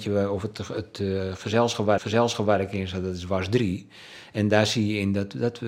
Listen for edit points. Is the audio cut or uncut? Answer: cut